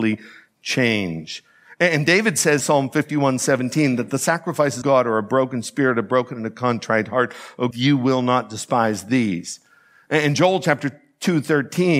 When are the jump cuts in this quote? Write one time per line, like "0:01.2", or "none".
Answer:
0:02.6
0:04.8
0:07.7